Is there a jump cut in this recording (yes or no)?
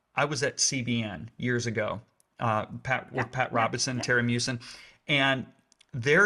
no